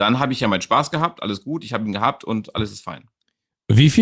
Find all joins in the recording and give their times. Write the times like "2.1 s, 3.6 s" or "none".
none